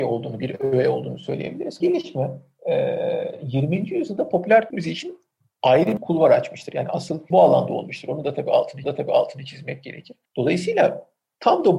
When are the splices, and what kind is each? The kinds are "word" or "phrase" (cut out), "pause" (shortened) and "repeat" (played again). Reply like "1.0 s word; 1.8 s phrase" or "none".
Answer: 1.8 s phrase; 4.7 s word; 6.0 s word; 7.3 s word; 8.8 s repeat; 10.3 s pause